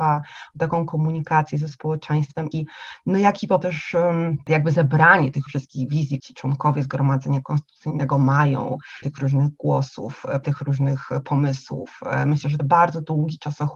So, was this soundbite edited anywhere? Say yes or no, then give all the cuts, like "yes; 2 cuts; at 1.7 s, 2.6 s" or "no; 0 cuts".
yes; 7 cuts; at 2.5 s, 3.6 s, 5.5 s, 6.2 s, 9.0 s, 10.4 s, 12.6 s